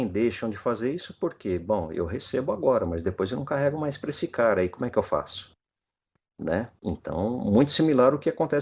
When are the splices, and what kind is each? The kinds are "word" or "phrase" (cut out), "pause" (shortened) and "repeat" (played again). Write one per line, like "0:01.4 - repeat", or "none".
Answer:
none